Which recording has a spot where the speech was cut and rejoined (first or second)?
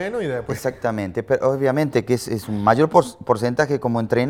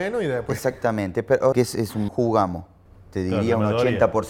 second